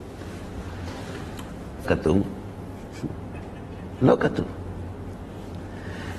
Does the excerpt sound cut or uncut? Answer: cut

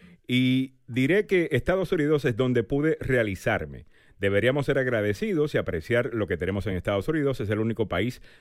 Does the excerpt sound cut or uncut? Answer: uncut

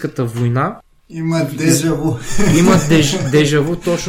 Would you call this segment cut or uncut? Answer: cut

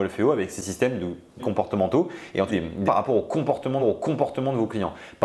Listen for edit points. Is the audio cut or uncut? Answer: cut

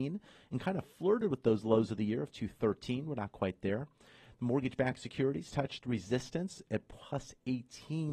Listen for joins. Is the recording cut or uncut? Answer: uncut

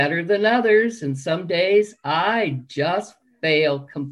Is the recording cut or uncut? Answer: uncut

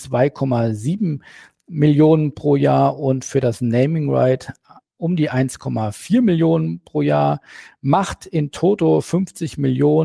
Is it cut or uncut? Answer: uncut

